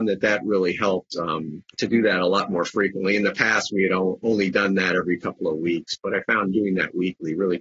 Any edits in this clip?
yes; 1 cut; at 1.7 s

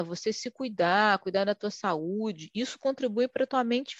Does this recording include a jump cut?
no; 0 cuts

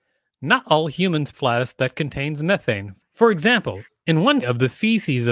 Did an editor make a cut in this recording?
yes; 2 cuts; at 1.3 s, 4.4 s

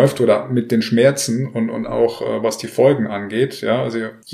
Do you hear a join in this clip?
no; 0 cuts

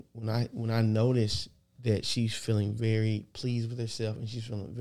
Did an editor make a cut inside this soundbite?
no; 0 cuts

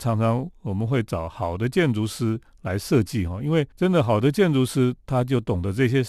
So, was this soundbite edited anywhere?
yes; 1 cut; at 3.7 s

